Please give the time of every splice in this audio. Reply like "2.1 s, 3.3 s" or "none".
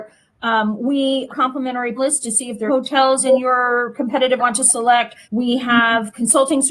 1.3 s, 2.0 s, 2.7 s, 4.4 s, 5.2 s